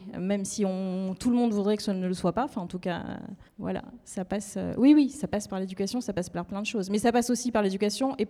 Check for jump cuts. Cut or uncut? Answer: cut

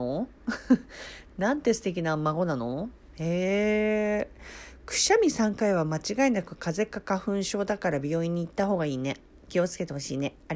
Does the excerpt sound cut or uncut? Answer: uncut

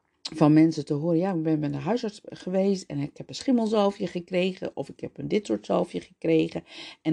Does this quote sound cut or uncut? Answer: uncut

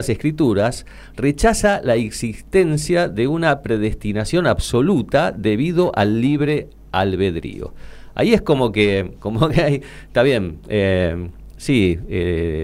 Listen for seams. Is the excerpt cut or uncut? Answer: uncut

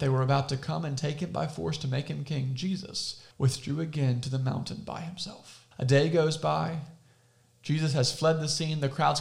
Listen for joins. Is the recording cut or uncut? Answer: cut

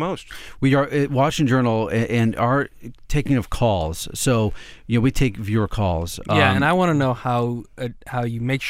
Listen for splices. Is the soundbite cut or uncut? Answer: uncut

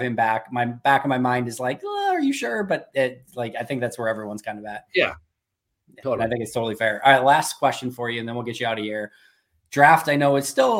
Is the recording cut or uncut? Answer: uncut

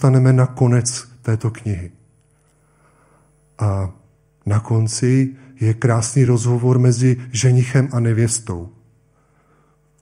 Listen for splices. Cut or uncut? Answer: uncut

